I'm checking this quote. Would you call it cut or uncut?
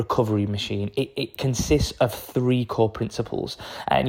uncut